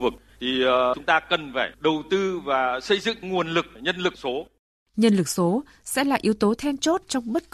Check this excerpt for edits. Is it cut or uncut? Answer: uncut